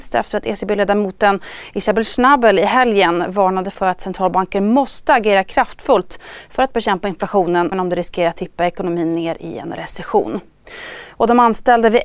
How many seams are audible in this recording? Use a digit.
1